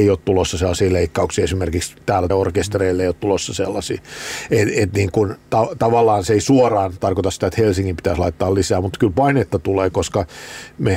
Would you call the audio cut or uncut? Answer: cut